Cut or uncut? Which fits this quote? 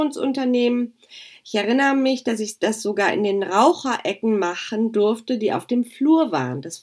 uncut